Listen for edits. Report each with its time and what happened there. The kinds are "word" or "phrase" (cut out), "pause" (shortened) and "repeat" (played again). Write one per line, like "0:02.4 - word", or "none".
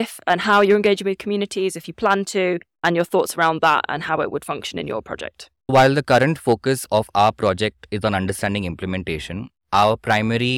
0:05.6 - pause